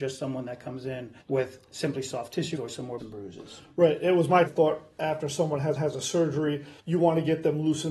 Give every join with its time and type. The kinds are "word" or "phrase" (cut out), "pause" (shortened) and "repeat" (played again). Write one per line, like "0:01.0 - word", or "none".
0:01.2 - pause
0:02.5 - word
0:03.0 - word
0:04.4 - word
0:05.8 - repeat
0:06.8 - pause